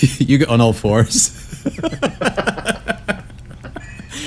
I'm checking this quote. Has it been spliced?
no; 0 cuts

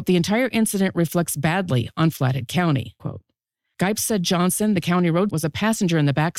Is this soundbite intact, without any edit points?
no; 2 cuts; at 3.0 s, 5.3 s

